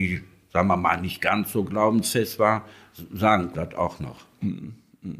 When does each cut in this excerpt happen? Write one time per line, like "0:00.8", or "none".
0:03.5